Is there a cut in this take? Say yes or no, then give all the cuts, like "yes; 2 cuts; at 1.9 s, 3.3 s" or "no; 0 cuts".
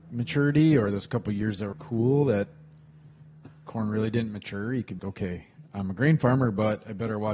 yes; 2 cuts; at 1.7 s, 5.0 s